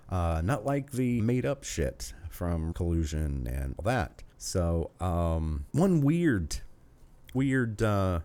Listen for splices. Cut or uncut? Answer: cut